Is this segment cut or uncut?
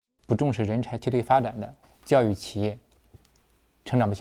cut